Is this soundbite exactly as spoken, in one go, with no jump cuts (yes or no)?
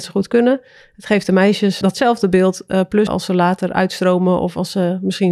no